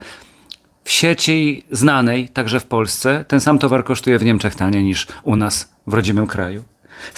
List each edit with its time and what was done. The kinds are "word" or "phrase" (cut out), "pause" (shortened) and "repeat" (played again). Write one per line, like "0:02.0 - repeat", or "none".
none